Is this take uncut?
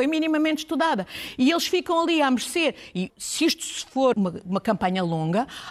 no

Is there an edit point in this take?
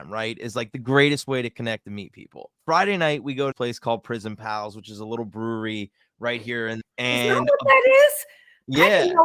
yes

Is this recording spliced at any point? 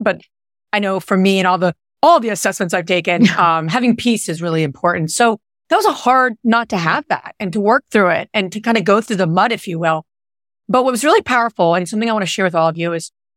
no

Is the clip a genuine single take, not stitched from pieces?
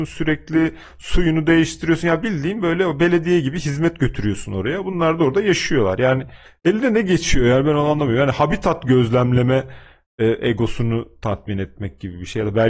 yes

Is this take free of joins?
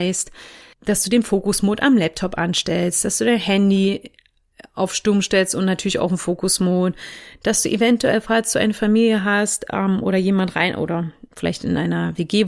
yes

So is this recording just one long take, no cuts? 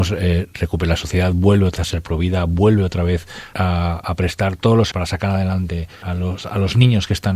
no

